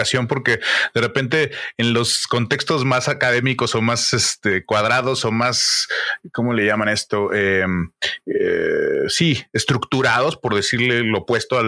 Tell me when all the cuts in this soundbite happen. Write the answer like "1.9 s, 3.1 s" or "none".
none